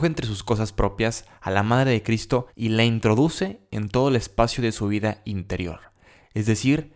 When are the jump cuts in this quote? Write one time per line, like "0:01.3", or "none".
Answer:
0:02.5